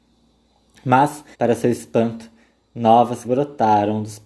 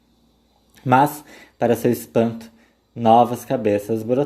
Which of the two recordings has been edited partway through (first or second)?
first